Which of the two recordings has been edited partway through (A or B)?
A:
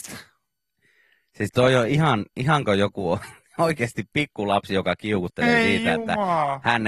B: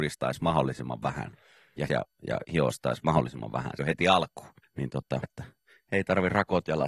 B